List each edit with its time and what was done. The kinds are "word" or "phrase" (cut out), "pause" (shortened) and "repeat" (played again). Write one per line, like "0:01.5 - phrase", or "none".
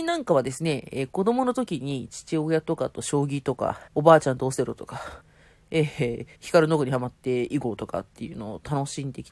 0:03.9 - pause
0:05.2 - pause
0:06.3 - pause